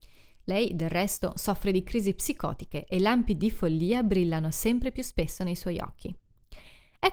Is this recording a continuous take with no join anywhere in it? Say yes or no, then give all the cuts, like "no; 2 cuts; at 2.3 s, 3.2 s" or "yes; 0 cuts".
yes; 0 cuts